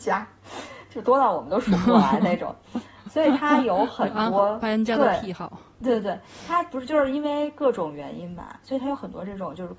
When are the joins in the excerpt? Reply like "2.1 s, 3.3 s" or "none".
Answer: none